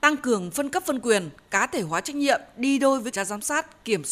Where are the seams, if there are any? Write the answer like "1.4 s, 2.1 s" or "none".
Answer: 3.1 s

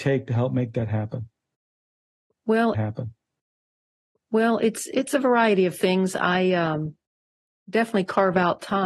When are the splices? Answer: 2.7 s

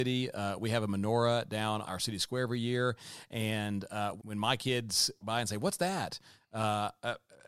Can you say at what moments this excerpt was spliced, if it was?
1.8 s, 4.2 s, 5.2 s

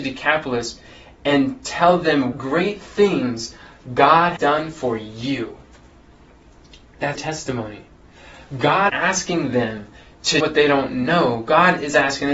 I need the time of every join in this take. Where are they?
2.3 s, 4.4 s, 7.2 s, 8.9 s, 10.4 s

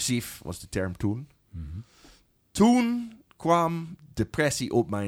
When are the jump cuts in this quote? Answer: none

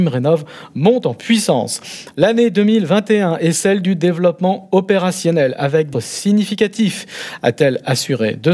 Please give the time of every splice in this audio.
5.9 s

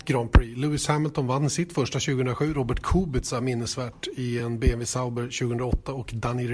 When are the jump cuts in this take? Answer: none

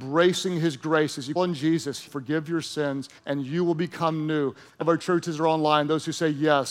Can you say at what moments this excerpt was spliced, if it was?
1.4 s, 2.1 s, 3.2 s, 4.8 s

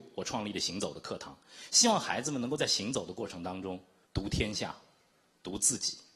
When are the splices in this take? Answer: none

